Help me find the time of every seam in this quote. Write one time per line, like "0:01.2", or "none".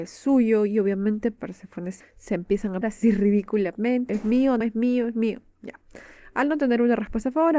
0:02.0
0:02.8
0:04.1
0:04.6